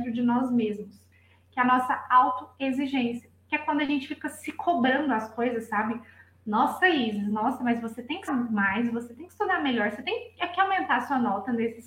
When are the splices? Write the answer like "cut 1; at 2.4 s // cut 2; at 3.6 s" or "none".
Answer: cut 1; at 8.3 s